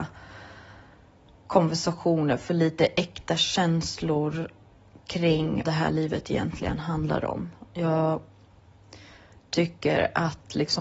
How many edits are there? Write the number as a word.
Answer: one